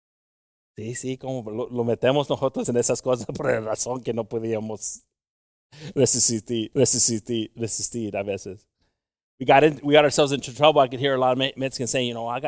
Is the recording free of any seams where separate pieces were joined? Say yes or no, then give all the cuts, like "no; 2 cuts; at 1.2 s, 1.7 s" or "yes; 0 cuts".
no; 1 cut; at 6.7 s